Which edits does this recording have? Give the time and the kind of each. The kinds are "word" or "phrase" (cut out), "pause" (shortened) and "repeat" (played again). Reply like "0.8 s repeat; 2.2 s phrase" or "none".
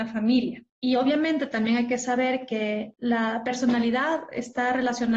none